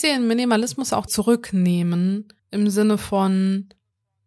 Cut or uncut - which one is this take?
cut